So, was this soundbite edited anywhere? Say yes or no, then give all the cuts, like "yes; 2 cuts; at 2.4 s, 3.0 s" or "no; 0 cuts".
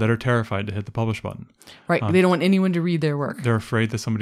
no; 0 cuts